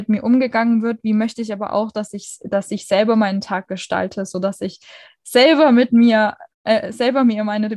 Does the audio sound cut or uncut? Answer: cut